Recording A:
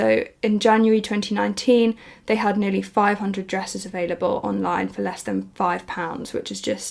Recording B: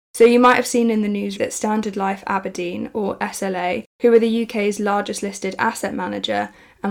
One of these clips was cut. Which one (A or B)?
B